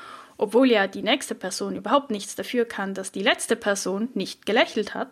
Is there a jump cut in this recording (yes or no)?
no